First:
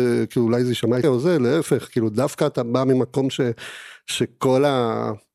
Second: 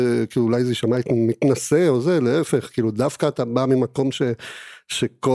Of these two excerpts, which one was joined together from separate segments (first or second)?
first